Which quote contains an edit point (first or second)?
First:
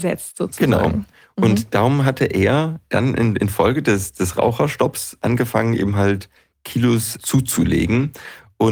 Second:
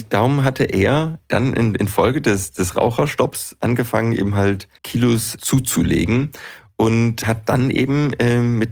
second